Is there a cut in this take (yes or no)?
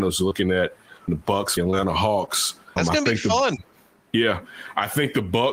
yes